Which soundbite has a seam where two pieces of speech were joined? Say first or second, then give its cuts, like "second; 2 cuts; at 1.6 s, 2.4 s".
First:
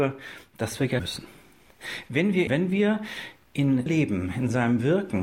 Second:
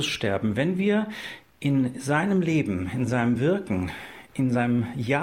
first; 3 cuts; at 1.0 s, 2.5 s, 3.9 s